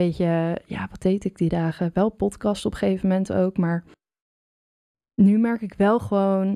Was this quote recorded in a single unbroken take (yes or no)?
yes